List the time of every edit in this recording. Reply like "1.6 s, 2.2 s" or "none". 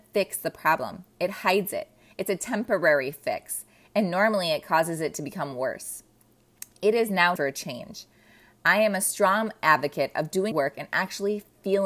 7.4 s, 10.5 s